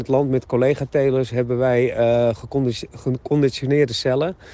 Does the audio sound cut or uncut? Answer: uncut